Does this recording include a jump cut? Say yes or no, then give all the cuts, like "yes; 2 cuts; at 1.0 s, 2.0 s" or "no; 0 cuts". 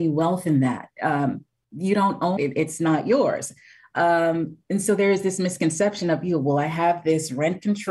yes; 1 cut; at 2.4 s